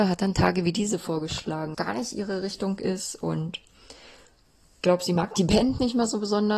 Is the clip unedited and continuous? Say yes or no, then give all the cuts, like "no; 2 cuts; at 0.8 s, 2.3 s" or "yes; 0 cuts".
no; 2 cuts; at 1.7 s, 4.8 s